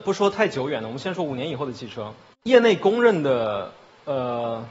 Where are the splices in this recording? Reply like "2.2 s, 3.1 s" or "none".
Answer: 2.3 s